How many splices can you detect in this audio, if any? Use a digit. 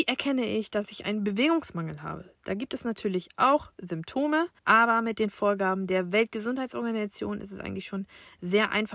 1